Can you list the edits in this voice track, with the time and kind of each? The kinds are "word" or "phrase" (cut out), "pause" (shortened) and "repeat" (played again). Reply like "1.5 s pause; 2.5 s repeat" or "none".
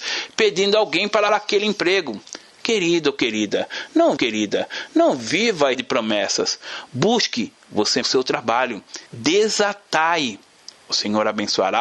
1.3 s word; 4.2 s repeat; 5.7 s word; 8.0 s word; 9.1 s pause

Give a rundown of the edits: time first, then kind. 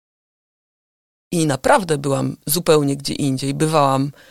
none

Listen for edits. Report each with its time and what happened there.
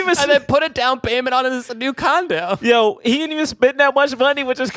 none

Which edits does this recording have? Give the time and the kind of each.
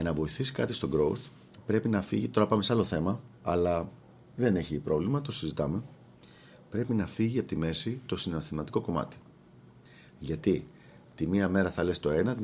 none

